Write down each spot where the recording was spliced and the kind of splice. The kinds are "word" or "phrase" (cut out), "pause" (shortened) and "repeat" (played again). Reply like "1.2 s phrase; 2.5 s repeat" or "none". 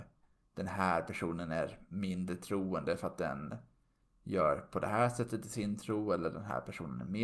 none